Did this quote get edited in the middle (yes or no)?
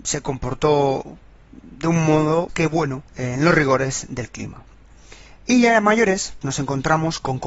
yes